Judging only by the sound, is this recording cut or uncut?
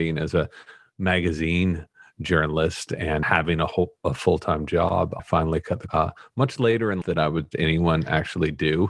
cut